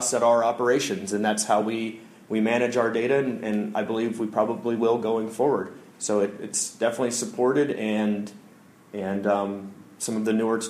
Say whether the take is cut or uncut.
uncut